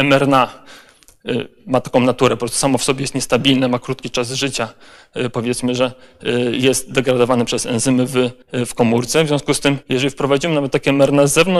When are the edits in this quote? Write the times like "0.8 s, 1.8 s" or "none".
8.4 s, 9.8 s

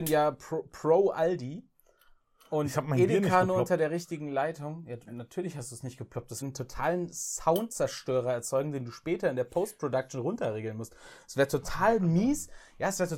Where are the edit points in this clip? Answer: 6.4 s

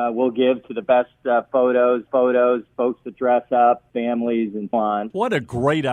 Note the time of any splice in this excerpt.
2.1 s, 4.7 s

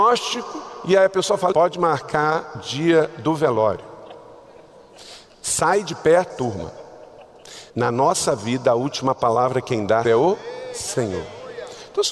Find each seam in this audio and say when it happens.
1.5 s, 2.5 s, 6.3 s, 7.7 s, 10.0 s

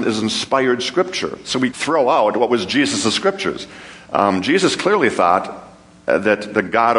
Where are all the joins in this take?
1.7 s

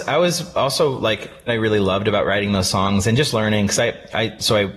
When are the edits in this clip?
1.5 s

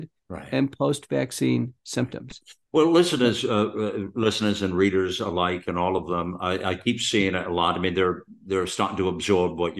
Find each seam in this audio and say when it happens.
none

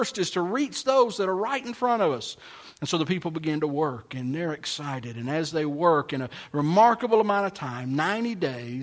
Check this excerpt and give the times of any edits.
none

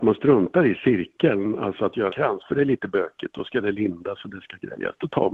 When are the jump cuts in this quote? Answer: 2.1 s

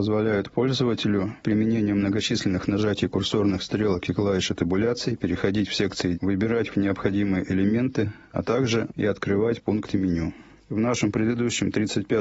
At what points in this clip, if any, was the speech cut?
1.4 s, 6.1 s, 6.7 s, 8.9 s

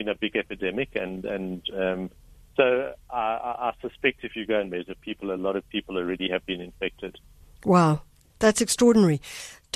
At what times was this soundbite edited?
none

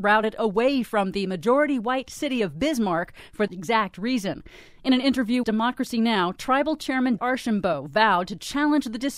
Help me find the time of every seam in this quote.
3.5 s, 5.4 s, 7.2 s

